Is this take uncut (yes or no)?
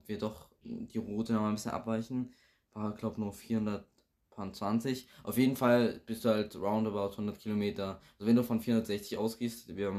yes